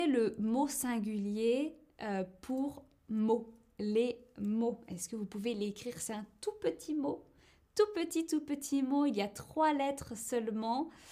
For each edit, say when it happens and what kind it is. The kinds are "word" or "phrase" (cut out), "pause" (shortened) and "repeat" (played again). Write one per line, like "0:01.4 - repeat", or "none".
none